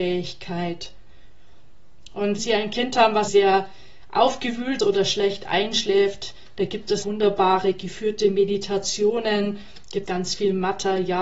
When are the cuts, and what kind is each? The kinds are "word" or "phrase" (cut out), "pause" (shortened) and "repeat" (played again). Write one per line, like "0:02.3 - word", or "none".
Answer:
0:02.4 - word
0:03.3 - word
0:04.8 - word
0:07.0 - word
0:10.1 - word